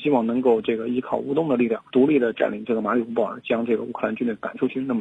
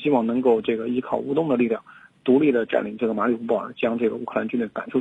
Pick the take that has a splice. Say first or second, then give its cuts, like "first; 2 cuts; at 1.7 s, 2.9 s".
first; 1 cut; at 1.9 s